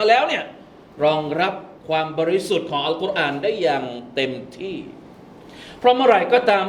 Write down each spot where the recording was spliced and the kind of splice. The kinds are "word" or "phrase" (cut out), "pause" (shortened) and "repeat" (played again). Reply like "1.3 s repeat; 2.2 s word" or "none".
1.8 s pause